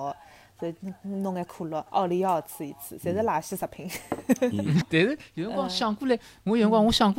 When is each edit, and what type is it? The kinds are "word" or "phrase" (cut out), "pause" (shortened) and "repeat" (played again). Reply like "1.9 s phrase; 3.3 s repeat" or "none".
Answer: 1.9 s pause